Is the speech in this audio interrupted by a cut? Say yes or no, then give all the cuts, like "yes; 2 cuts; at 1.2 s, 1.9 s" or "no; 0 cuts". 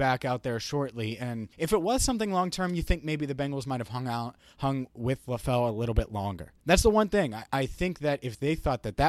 yes; 2 cuts; at 1.5 s, 6.6 s